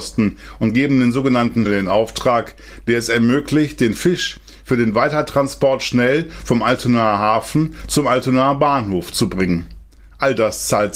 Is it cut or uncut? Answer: cut